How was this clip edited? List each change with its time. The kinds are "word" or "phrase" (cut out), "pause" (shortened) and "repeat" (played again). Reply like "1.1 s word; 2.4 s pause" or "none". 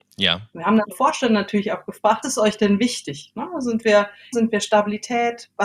0.9 s word; 2.2 s word; 4.3 s word